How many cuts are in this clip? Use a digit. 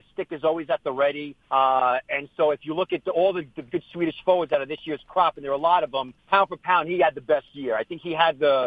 3